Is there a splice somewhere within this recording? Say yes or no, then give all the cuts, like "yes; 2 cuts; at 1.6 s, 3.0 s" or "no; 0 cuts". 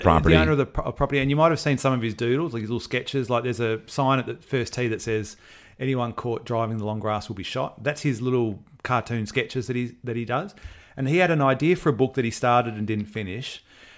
no; 0 cuts